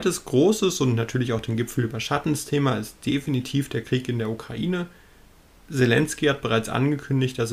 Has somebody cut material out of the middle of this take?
no; 0 cuts

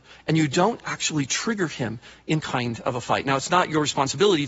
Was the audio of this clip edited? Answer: yes; 1 cut; at 2.4 s

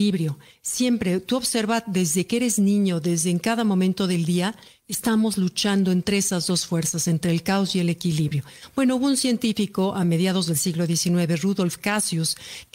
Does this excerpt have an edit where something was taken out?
no; 0 cuts

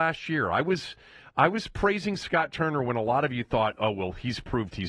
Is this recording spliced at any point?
no; 0 cuts

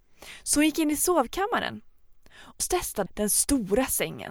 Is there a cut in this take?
yes; 2 cuts; at 2.6 s, 3.1 s

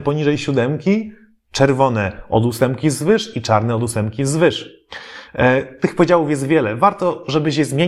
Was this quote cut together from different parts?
no; 0 cuts

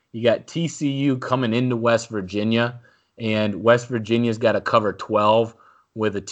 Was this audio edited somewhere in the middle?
no; 0 cuts

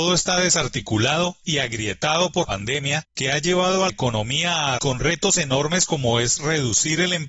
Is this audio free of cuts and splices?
no; 4 cuts; at 2.4 s, 3.1 s, 3.9 s, 4.8 s

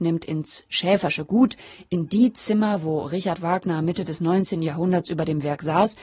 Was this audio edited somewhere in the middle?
no; 0 cuts

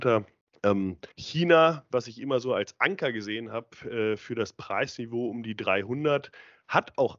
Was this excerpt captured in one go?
no; 1 cut; at 1.1 s

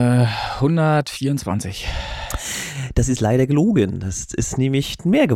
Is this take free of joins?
yes; 0 cuts

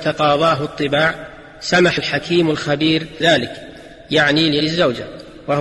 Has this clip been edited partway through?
yes; 3 cuts; at 2.0 s, 3.2 s, 4.6 s

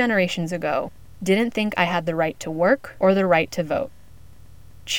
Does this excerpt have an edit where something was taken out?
no; 0 cuts

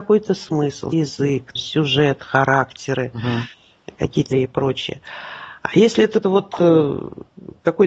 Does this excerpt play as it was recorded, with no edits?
no; 4 cuts; at 0.9 s, 1.6 s, 4.3 s, 6.2 s

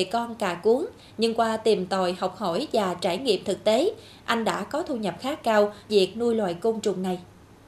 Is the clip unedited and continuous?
no; 1 cut; at 5.9 s

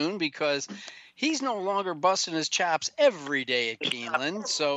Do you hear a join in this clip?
no; 0 cuts

